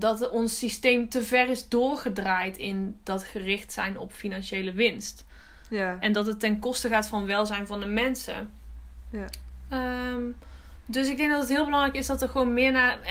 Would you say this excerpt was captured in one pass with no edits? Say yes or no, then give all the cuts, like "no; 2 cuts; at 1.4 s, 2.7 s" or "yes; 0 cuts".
yes; 0 cuts